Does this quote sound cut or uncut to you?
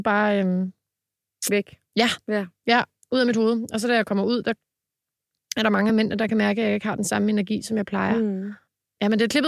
uncut